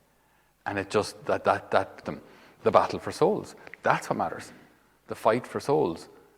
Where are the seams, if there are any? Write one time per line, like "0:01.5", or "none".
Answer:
0:02.0